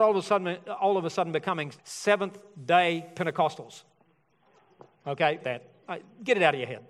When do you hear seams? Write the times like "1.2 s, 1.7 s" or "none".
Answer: 1.8 s, 5.4 s